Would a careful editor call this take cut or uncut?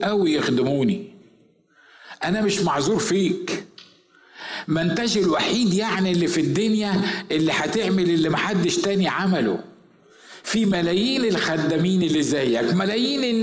uncut